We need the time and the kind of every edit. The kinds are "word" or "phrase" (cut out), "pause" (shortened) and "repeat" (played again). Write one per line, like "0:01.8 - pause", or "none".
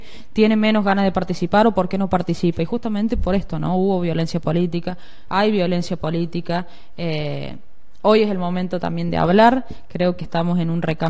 none